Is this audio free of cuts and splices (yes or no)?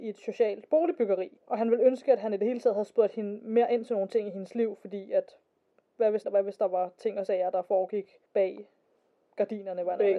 no